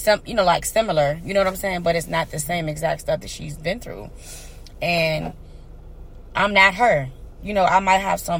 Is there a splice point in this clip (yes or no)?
no